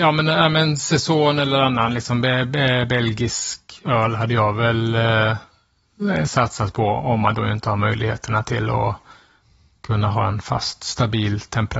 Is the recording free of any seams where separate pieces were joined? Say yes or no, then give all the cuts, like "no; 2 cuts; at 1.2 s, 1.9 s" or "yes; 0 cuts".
yes; 0 cuts